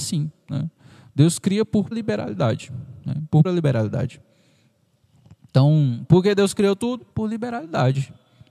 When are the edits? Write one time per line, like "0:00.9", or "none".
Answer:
0:01.9
0:03.0
0:03.4
0:07.1